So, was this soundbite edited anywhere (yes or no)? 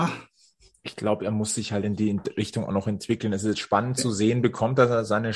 no